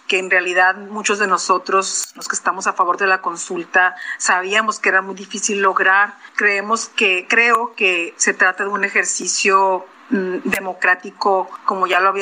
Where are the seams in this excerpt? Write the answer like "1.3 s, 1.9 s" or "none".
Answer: none